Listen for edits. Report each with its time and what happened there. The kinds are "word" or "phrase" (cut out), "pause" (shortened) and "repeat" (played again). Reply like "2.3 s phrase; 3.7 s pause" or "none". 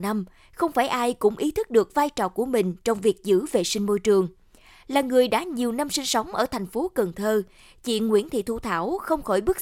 none

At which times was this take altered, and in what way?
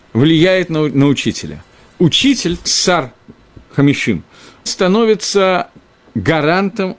2.7 s word; 4.7 s word

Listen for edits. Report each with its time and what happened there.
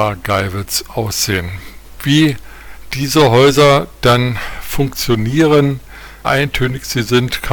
6.2 s word

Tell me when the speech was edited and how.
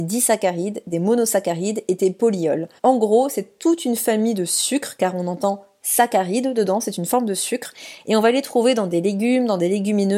2.8 s pause

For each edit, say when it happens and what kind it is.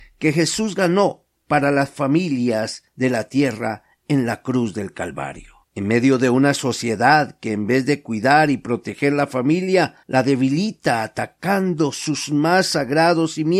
2.9 s pause; 5.6 s pause; 10.0 s pause

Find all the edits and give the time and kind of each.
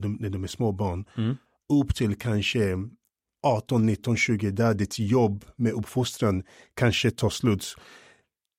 none

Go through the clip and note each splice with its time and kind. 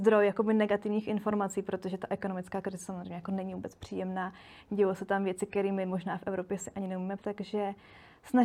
7.2 s word

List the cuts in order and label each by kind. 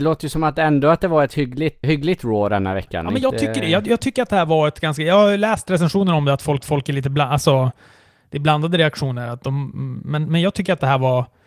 1.8 s word; 6.6 s repeat

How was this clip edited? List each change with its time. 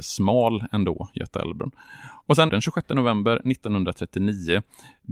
2.5 s phrase

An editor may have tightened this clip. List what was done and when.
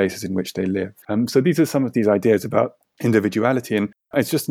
1.0 s pause

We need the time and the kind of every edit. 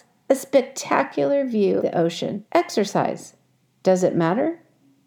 1.8 s word; 2.5 s pause

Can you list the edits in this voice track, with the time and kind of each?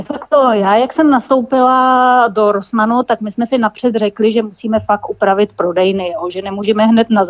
none

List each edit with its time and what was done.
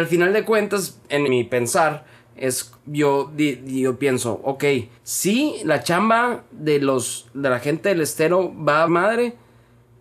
1.3 s word; 2.8 s pause; 5.0 s pause; 8.9 s word

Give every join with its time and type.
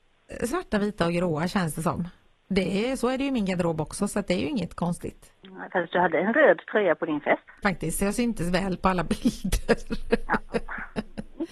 7.6 s phrase

